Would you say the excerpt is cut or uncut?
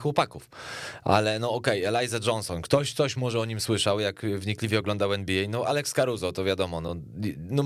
uncut